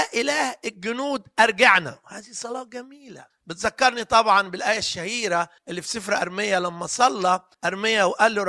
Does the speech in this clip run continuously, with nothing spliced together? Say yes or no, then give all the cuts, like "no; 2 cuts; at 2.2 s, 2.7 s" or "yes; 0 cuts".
no; 3 cuts; at 3.3 s, 5.6 s, 7.5 s